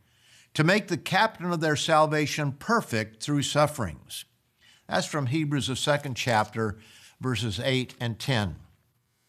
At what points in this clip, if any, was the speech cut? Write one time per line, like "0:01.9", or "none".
none